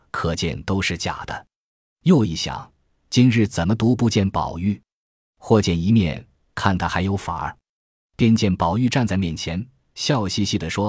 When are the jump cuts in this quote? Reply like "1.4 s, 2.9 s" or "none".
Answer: none

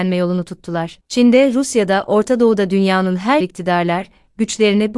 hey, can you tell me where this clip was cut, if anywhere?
3.4 s

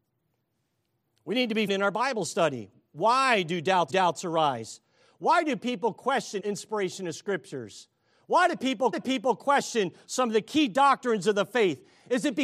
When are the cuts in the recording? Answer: 1.7 s, 3.9 s, 6.4 s, 8.9 s

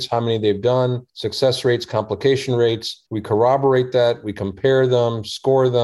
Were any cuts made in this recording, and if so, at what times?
1.1 s, 3.1 s

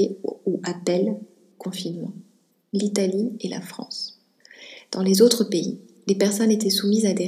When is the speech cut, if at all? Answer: none

